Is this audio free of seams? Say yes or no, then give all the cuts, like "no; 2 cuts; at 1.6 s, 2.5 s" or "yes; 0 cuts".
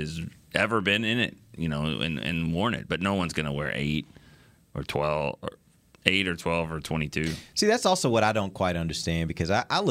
yes; 0 cuts